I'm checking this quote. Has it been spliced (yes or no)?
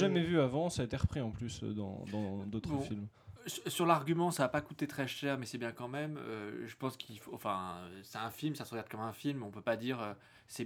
no